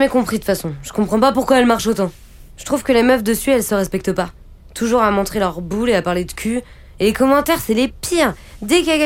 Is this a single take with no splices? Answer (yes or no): yes